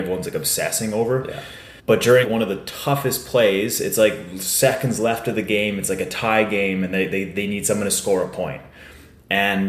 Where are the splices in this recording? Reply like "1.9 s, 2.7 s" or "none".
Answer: 1.8 s, 2.2 s